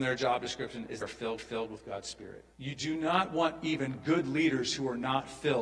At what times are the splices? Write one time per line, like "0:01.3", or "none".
0:01.0
0:01.4
0:02.5